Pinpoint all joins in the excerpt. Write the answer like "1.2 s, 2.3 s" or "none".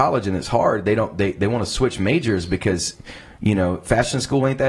none